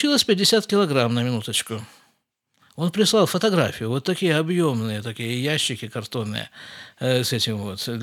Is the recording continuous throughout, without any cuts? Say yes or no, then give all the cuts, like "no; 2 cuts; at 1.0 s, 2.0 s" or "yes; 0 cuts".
yes; 0 cuts